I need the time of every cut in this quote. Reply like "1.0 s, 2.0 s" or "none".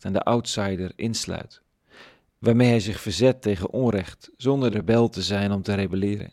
4.7 s

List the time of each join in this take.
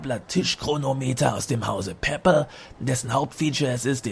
none

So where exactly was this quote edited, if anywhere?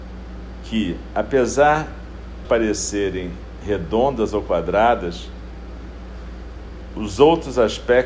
2.4 s

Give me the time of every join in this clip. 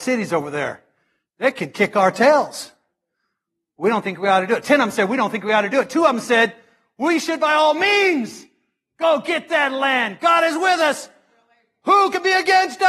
none

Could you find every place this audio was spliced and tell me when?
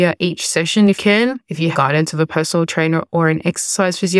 1.0 s, 1.7 s

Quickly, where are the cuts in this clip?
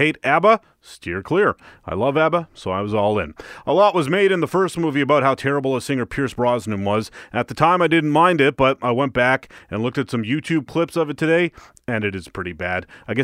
none

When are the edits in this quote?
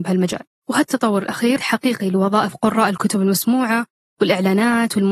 1.6 s

